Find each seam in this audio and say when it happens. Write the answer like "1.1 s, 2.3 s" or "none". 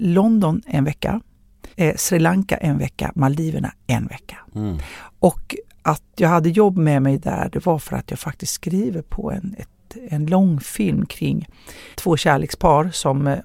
1.7 s, 11.9 s